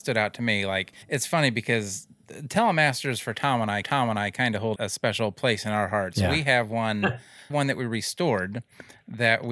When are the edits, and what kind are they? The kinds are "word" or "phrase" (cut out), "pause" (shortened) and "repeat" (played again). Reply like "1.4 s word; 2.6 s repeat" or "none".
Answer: 1.0 s pause; 3.8 s repeat; 4.8 s word; 7.5 s phrase